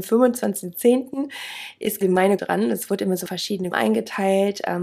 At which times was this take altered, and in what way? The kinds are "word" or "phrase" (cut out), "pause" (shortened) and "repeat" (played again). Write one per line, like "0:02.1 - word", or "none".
0:02.0 - word
0:02.4 - word
0:03.3 - word
0:03.7 - word